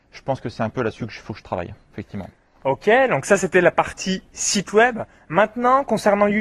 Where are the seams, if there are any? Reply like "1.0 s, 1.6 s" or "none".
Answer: none

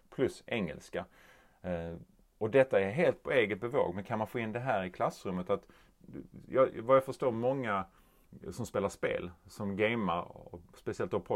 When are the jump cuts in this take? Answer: none

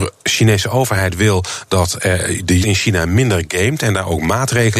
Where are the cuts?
2.6 s

